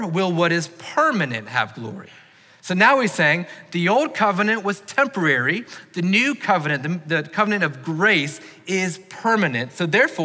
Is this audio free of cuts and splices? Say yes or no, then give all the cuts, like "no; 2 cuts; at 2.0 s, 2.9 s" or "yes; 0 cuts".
yes; 0 cuts